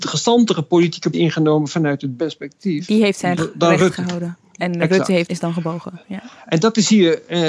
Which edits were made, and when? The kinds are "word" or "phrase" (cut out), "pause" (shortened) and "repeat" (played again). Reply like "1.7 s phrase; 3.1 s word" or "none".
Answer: 1.1 s word; 2.2 s word; 3.4 s word; 5.3 s word